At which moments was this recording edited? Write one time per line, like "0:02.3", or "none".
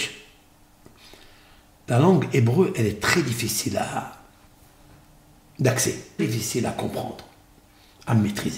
0:06.2